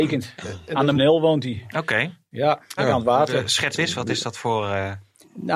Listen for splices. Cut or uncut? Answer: cut